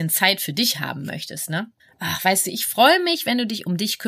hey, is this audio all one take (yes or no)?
no